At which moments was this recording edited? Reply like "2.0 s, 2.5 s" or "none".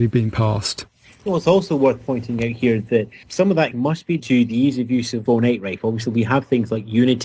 1.3 s, 3.2 s, 3.7 s, 4.2 s, 5.3 s